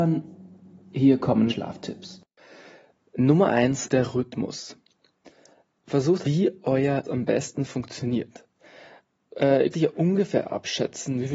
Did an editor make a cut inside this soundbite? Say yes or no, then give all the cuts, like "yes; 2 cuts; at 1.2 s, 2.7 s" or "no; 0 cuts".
yes; 5 cuts; at 1.5 s, 3.9 s, 6.2 s, 7.0 s, 9.7 s